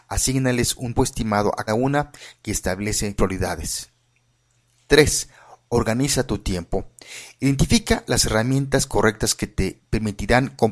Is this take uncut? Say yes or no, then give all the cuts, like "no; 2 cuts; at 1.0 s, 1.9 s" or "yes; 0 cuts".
no; 3 cuts; at 1.0 s, 1.7 s, 3.2 s